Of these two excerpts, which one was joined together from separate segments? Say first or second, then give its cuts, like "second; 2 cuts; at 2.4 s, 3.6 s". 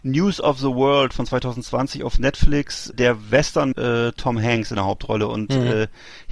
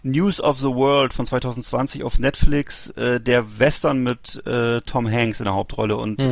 first; 2 cuts; at 2.9 s, 3.7 s